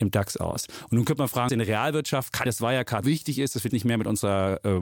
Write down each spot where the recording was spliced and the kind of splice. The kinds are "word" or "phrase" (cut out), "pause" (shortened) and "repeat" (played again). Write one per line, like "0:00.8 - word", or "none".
0:01.5 - word
0:02.5 - phrase
0:03.0 - word
0:03.7 - word